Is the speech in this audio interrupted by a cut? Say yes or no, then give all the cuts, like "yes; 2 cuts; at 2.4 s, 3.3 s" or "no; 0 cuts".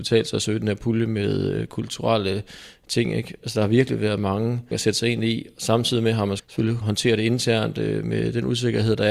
yes; 3 cuts; at 4.7 s, 6.4 s, 6.8 s